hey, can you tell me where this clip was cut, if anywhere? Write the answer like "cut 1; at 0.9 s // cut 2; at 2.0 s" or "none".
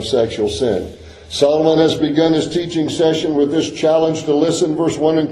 none